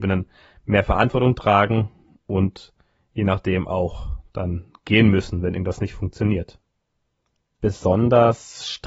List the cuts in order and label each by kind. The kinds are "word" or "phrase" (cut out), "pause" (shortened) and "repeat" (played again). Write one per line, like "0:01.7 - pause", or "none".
none